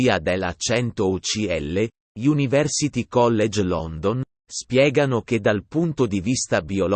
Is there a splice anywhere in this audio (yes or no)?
no